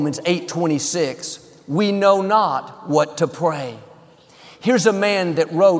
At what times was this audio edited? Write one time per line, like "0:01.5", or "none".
none

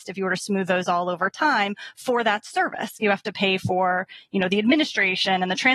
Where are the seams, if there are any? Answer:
none

